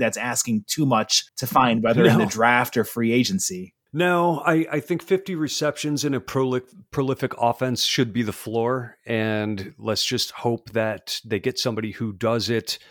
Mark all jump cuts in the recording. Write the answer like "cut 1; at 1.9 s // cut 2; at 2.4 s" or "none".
cut 1; at 1.3 s